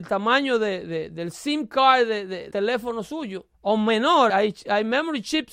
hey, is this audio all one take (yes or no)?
no